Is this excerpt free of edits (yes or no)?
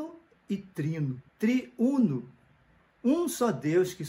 no